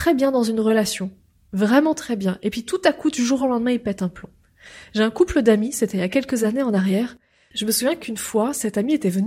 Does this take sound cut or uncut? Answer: uncut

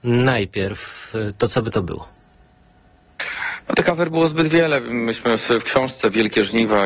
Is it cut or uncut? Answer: uncut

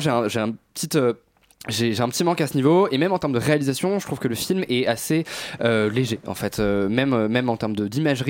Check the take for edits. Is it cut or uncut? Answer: uncut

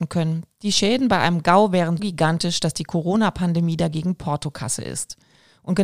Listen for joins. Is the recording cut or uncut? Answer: cut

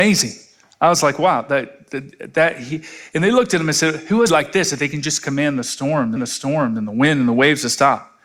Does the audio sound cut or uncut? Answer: cut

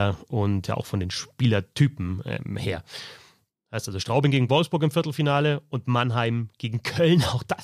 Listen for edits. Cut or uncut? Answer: uncut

